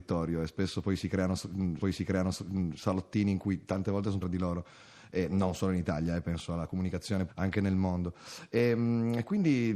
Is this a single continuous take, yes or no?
no